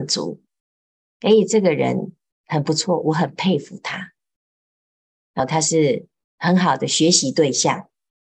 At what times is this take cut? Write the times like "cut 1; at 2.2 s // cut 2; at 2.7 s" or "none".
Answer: cut 1; at 5.4 s